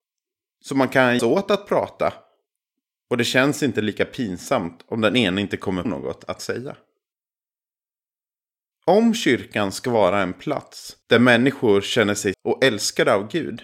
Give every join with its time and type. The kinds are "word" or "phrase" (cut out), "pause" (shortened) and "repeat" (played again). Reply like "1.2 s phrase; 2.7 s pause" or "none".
1.2 s word; 5.8 s word; 11.0 s pause; 12.3 s word